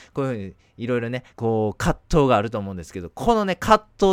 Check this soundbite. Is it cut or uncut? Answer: cut